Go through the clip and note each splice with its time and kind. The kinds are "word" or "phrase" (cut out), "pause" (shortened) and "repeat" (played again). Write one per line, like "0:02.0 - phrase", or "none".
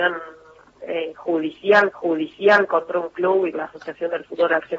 0:01.9 - repeat
0:03.5 - word